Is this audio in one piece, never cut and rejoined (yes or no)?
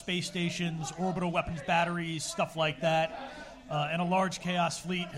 yes